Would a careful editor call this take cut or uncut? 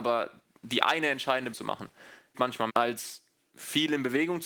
cut